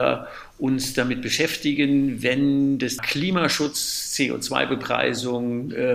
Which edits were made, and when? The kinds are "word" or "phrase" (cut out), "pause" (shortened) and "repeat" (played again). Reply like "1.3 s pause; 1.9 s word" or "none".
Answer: 3.0 s word